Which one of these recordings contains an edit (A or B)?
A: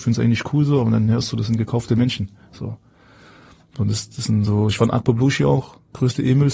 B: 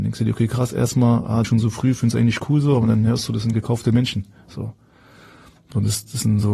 B